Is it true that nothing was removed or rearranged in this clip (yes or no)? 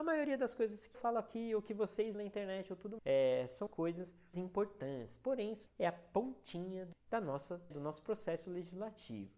no